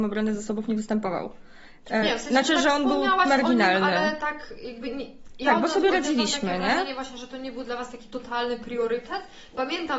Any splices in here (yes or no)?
yes